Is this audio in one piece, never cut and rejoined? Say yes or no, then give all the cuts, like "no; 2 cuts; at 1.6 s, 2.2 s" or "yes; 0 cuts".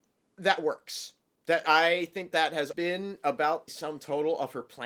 no; 4 cuts; at 1.6 s, 2.3 s, 2.7 s, 3.7 s